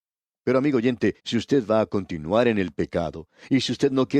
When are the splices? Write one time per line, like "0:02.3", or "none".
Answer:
0:01.2